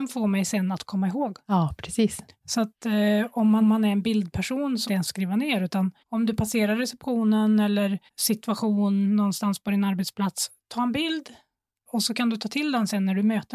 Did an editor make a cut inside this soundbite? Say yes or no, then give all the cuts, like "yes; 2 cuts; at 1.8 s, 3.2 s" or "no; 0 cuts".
yes; 5 cuts; at 3.6 s, 4.9 s, 6.0 s, 8.1 s, 11.9 s